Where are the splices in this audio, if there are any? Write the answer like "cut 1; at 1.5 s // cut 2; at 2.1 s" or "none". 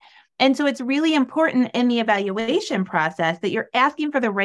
none